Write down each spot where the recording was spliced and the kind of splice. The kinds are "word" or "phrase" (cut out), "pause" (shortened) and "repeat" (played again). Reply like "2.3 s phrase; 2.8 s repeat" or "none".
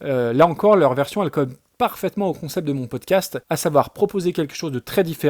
3.4 s pause